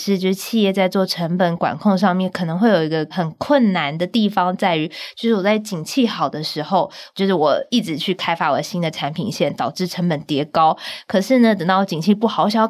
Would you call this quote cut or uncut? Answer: uncut